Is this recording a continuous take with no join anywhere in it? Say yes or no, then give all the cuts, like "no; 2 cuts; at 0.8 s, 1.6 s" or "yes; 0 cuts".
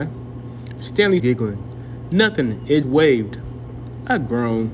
no; 2 cuts; at 1.2 s, 2.8 s